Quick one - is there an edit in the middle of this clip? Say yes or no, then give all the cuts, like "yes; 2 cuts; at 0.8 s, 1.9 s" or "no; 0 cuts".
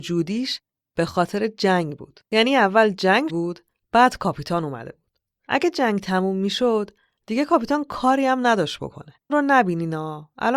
yes; 3 cuts; at 2.3 s, 3.3 s, 9.3 s